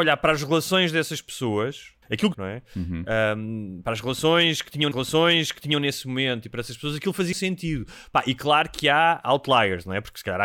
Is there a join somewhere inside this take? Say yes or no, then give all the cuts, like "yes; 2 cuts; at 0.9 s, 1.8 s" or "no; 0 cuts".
yes; 4 cuts; at 2.0 s, 2.3 s, 4.9 s, 7.3 s